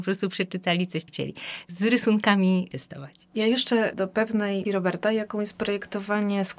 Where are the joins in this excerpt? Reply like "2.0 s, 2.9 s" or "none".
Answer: 1.1 s, 2.7 s, 3.9 s, 4.6 s